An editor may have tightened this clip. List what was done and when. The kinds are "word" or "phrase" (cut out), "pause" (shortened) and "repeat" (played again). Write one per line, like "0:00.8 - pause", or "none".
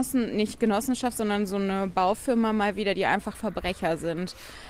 0:03.3 - word